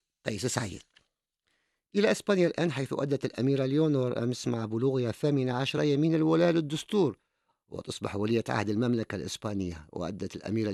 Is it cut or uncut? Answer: uncut